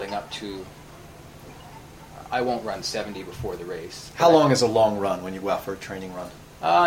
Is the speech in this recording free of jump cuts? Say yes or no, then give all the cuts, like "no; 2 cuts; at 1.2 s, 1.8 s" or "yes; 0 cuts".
yes; 0 cuts